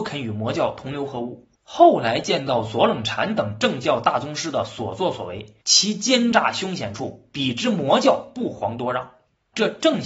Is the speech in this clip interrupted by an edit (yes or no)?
yes